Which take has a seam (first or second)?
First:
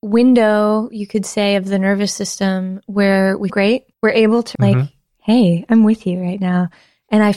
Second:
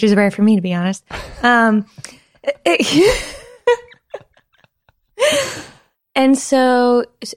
first